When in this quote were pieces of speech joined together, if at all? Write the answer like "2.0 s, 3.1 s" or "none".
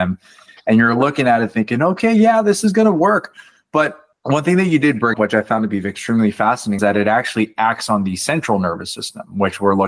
5.1 s, 6.8 s

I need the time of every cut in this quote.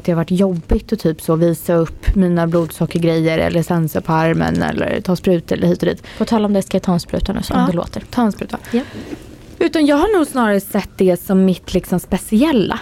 none

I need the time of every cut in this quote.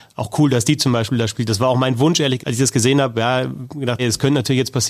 2.4 s, 4.0 s

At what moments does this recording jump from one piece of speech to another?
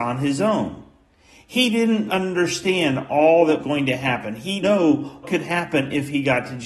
2.1 s, 3.6 s, 4.6 s, 5.2 s

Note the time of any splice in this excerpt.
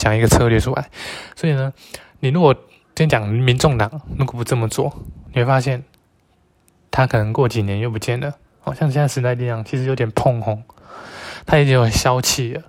none

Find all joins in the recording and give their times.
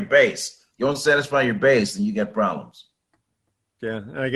none

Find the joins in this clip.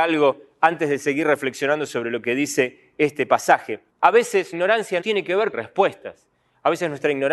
3.9 s, 4.5 s, 5.0 s, 5.5 s

